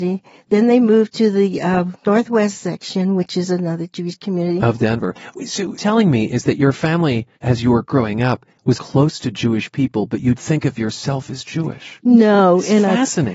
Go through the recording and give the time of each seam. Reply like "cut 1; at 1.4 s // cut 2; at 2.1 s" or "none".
cut 1; at 5.8 s // cut 2; at 7.3 s // cut 3; at 8.7 s // cut 4; at 10.4 s